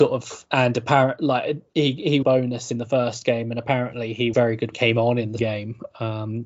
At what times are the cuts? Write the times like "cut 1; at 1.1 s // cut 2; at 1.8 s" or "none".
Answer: cut 1; at 1.7 s // cut 2; at 2.2 s // cut 3; at 4.3 s // cut 4; at 4.7 s // cut 5; at 5.4 s